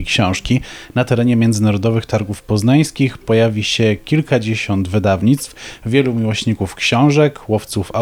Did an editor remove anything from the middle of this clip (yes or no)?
no